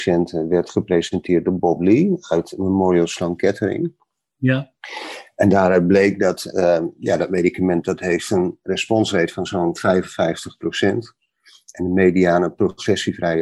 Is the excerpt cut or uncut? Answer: uncut